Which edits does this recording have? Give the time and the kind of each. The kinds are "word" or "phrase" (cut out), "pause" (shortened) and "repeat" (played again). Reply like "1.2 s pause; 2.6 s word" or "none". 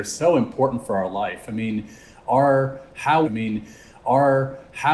3.2 s repeat